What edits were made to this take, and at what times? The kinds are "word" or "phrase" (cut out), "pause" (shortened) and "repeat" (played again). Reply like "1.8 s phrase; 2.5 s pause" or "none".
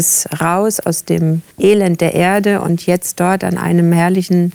1.5 s pause